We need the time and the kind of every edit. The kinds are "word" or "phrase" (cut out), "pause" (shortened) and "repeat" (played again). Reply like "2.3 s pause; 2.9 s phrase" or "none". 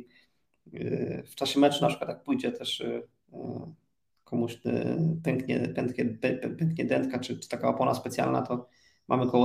none